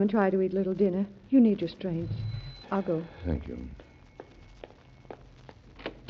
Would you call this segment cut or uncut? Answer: cut